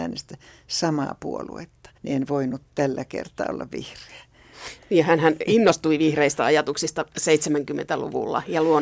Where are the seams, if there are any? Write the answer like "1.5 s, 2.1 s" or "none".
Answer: 2.0 s